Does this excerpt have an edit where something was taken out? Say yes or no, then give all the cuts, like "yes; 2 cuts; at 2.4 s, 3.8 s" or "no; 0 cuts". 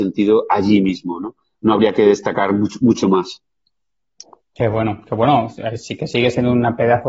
no; 0 cuts